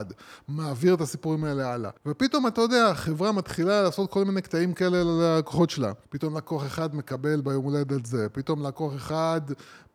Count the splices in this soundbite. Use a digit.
2